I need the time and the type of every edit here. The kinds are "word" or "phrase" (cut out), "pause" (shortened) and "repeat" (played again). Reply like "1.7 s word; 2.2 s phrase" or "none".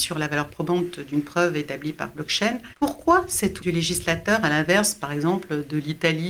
2.7 s pause; 3.6 s word